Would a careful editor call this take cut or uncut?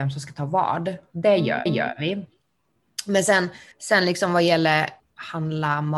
cut